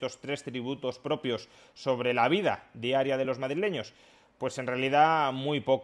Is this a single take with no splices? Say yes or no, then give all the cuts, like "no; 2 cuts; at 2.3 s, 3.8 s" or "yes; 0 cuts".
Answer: yes; 0 cuts